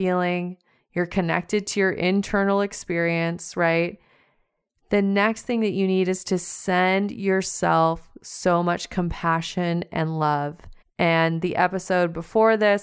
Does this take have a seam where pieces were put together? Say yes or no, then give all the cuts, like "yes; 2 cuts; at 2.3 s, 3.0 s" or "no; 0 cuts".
yes; 1 cut; at 10.8 s